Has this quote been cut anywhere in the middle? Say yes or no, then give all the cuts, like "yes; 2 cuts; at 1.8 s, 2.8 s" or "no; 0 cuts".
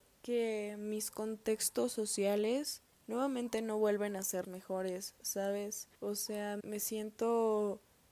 yes; 4 cuts; at 2.9 s, 4.4 s, 5.9 s, 6.6 s